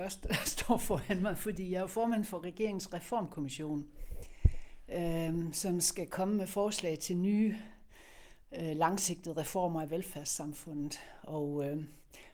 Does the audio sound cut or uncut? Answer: uncut